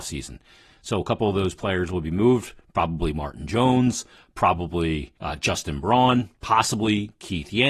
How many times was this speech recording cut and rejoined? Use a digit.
2